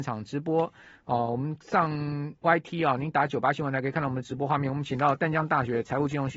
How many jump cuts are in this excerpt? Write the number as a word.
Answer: one